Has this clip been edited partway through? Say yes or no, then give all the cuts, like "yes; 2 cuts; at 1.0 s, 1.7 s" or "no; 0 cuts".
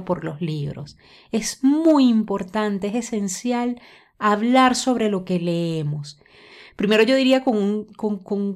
no; 0 cuts